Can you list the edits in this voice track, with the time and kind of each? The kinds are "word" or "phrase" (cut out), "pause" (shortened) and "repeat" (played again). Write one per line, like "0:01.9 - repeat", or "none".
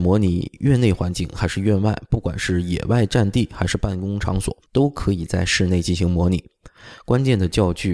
0:04.7 - pause

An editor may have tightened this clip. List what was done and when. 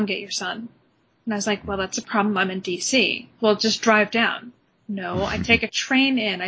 none

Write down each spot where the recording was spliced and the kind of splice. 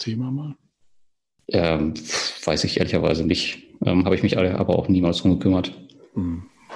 none

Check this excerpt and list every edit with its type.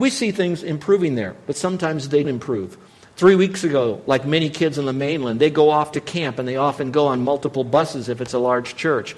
0:02.2 - word

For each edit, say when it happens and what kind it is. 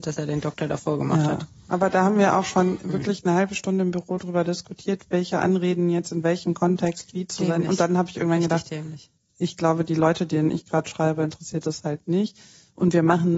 0:09.2 - pause

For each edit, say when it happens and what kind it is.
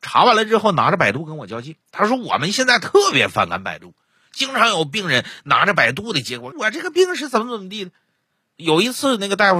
0:01.8 - pause
0:06.5 - word

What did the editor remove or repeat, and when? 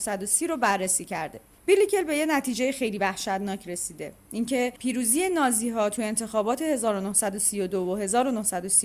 none

